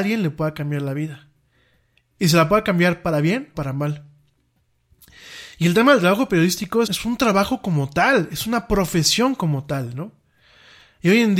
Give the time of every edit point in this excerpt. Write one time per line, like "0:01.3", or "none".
0:03.5
0:06.8